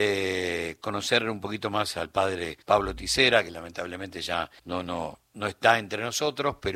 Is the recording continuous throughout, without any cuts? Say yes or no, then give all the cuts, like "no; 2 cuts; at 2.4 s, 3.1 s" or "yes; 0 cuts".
no; 3 cuts; at 2.6 s, 4.6 s, 5.3 s